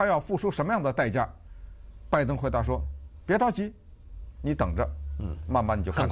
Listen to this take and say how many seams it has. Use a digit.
0